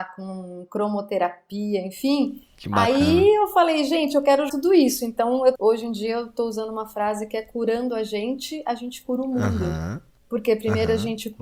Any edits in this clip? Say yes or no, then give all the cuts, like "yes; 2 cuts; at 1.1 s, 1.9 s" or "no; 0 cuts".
yes; 3 cuts; at 4.5 s, 5.5 s, 10.2 s